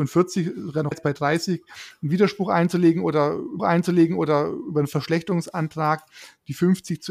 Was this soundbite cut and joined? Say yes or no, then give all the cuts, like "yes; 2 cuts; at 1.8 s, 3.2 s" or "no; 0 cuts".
yes; 2 cuts; at 0.9 s, 3.6 s